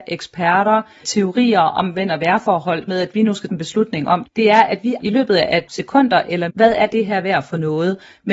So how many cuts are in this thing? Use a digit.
7